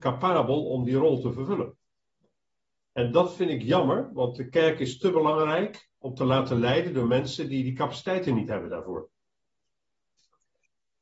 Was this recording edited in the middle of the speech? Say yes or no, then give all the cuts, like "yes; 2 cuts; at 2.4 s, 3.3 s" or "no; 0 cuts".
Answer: yes; 1 cut; at 5.9 s